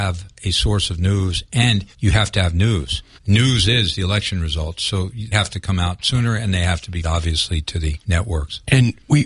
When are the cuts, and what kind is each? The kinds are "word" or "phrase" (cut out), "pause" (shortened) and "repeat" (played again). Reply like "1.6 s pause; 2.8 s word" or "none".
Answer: 1.9 s pause; 3.2 s pause; 5.3 s word; 7.0 s word; 8.0 s pause

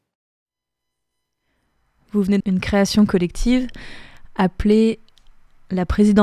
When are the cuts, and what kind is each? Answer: 2.4 s word

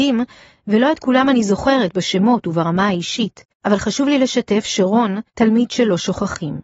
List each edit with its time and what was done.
3.5 s pause; 5.3 s pause

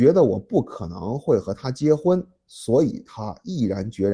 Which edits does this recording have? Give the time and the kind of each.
none

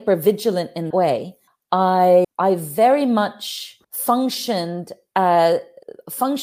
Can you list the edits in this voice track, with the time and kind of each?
0.9 s word; 2.2 s word; 3.8 s pause

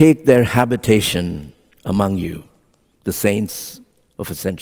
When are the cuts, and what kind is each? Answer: none

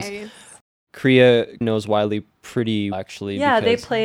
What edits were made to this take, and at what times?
1.6 s word; 2.9 s word

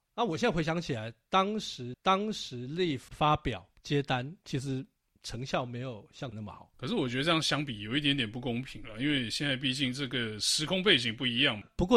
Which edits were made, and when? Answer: 1.9 s repeat; 3.8 s pause; 4.4 s pause; 6.3 s word; 6.7 s pause

